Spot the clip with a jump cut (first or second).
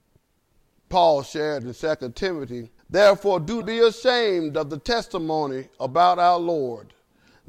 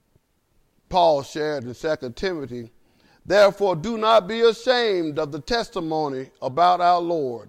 first